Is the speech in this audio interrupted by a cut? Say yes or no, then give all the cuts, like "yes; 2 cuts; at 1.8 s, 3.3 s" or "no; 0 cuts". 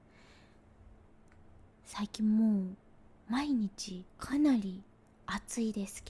yes; 2 cuts; at 1.7 s, 4.1 s